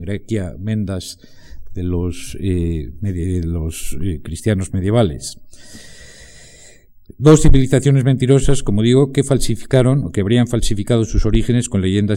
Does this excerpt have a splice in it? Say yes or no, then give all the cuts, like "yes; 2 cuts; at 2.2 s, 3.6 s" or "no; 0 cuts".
no; 0 cuts